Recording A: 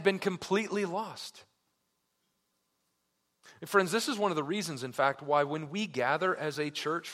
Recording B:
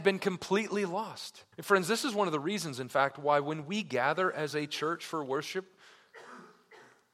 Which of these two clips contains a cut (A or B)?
B